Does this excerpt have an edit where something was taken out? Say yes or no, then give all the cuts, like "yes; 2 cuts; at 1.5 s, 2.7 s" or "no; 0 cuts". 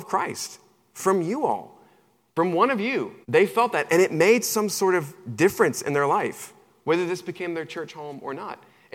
yes; 1 cut; at 3.2 s